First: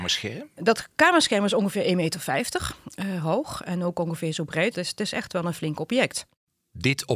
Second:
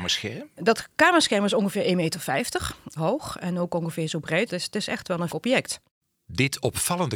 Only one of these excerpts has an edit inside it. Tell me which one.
second; 2 cuts; at 3.0 s, 5.3 s

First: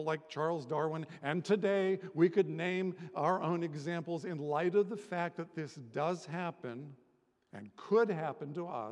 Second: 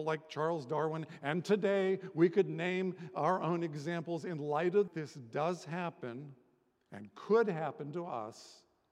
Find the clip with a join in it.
second; 1 cut; at 4.9 s

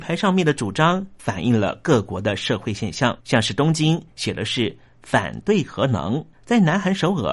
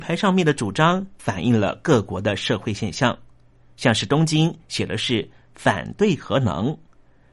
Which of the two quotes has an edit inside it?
first; 2 cuts; at 3.2 s, 6.3 s

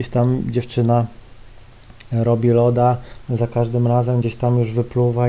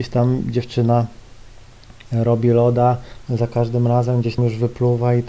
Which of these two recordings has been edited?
second; 1 cut; at 4.4 s

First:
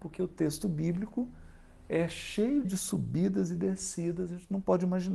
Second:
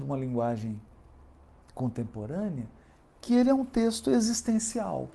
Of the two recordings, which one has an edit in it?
first; 1 cut; at 2.6 s

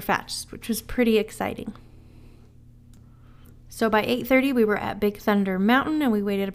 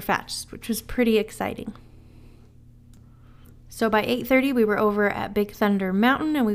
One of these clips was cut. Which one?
first; 1 cut; at 4.8 s

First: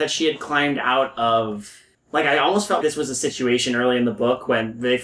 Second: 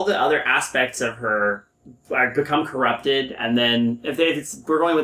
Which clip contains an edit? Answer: first; 1 cut; at 2.8 s

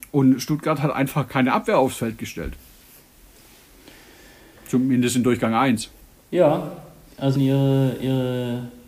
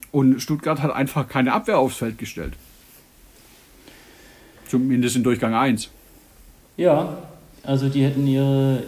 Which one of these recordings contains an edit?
first; 2 cuts; at 6.0 s, 7.4 s

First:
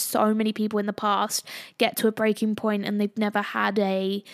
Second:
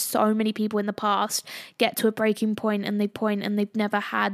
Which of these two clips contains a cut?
second; 1 cut; at 3.1 s

